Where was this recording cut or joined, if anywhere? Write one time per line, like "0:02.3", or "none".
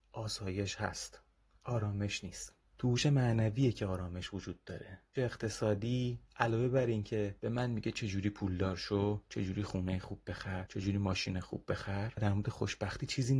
0:05.2